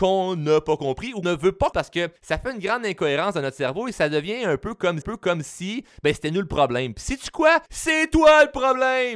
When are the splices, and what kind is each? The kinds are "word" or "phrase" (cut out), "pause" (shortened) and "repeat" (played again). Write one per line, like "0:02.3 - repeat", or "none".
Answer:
0:01.2 - word
0:01.7 - word
0:02.2 - pause
0:05.0 - repeat
0:07.7 - pause

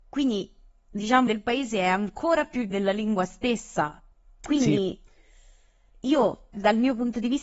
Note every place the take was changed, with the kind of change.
0:01.3 - word
0:02.7 - word
0:04.1 - pause
0:06.5 - word

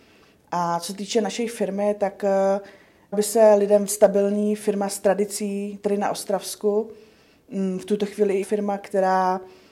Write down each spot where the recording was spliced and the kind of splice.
0:03.1 - word
0:03.9 - word
0:08.4 - word

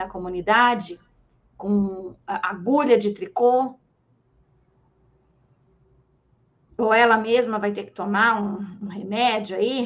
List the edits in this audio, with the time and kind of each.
none

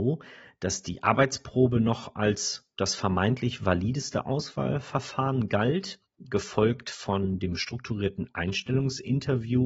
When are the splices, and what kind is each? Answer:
none

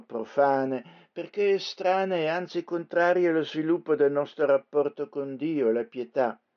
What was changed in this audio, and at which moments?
none

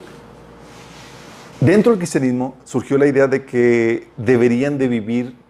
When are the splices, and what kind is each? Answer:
0:01.5 - pause
0:04.1 - pause

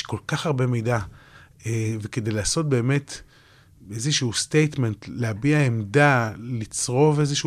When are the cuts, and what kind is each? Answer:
none

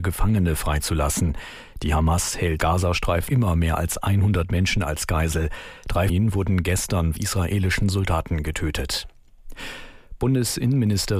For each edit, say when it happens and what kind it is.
0:02.6 - word
0:03.3 - word
0:06.1 - word
0:07.2 - phrase

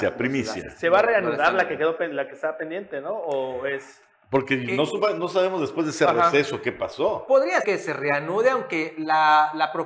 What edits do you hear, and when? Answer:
0:07.6 - word

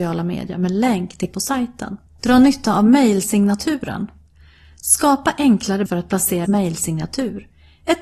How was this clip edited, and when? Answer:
0:01.3 - word
0:02.1 - pause
0:05.9 - word
0:06.4 - phrase

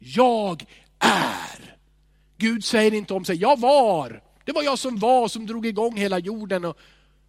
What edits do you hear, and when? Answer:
none

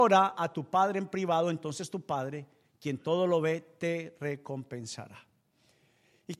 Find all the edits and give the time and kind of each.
none

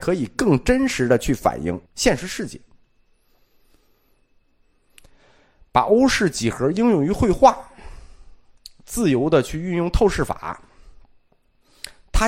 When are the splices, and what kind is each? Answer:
0:01.9 - pause

